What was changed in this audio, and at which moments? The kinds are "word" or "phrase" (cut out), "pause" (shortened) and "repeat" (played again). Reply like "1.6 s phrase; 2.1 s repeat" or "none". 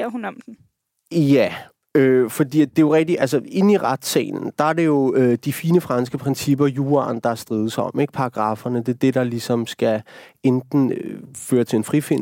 none